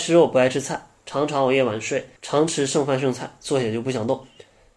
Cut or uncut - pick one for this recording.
cut